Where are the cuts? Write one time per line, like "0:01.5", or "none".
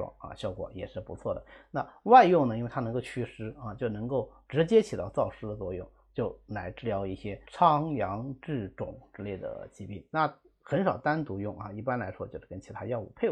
0:07.4

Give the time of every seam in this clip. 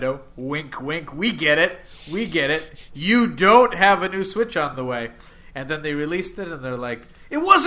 none

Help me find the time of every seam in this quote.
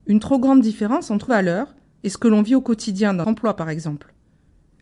0:01.3
0:03.2

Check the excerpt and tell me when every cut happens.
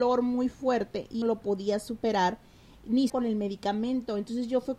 0:01.2
0:03.1

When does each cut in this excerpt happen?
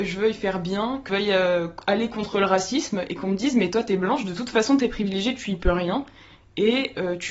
0:01.1

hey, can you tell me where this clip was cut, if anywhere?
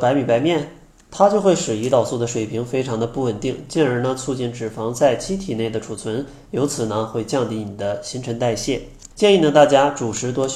0:00.9
0:09.1

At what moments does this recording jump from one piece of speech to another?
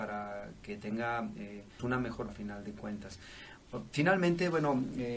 0:01.8
0:02.3

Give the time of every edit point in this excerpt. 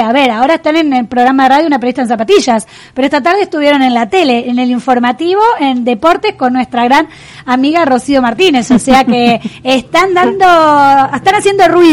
none

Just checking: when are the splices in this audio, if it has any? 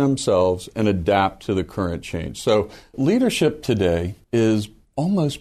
0:04.2

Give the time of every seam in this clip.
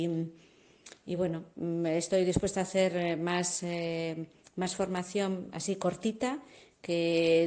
none

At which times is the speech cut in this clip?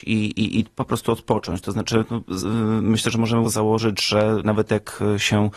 0:02.4
0:03.4

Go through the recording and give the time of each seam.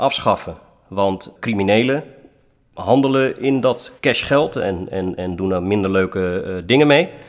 0:01.4
0:04.0

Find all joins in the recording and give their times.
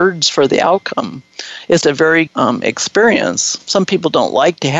0:01.8
0:02.3

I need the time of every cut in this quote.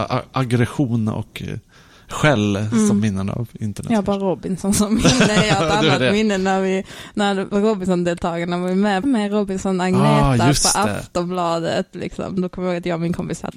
0:09.0

